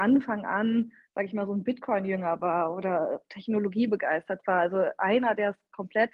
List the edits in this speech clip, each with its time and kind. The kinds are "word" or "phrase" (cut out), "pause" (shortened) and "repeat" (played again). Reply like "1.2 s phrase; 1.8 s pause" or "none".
none